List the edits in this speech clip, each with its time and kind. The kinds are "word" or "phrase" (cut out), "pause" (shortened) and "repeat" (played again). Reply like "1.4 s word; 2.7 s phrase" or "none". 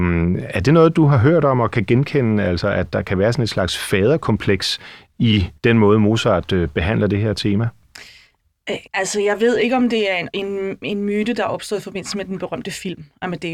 5.6 s pause; 8.9 s pause